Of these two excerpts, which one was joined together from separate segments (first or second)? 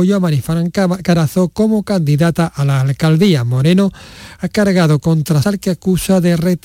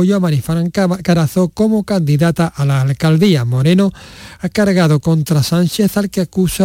first